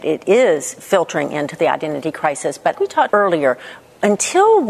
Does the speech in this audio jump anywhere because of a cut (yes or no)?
yes